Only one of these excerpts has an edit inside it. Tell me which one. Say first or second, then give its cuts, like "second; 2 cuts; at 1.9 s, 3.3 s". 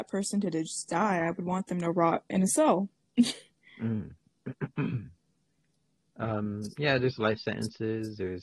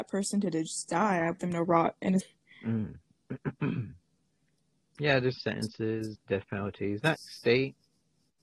second; 6 cuts; at 1.4 s, 2.2 s, 4.9 s, 5.4 s, 6.1 s, 7.1 s